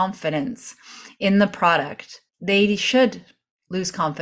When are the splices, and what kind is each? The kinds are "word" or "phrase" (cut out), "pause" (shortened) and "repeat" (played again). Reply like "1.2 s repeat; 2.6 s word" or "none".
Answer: 2.3 s pause

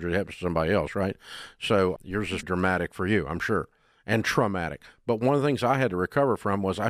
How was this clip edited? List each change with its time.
2.0 s word; 2.4 s word

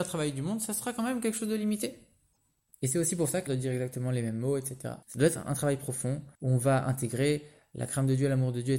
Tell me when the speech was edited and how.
3.5 s word; 5.0 s pause; 6.3 s pause

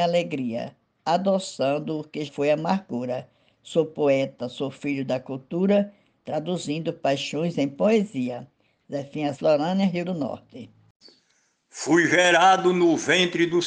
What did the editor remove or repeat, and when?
2.3 s word; 9.3 s word; 10.0 s word

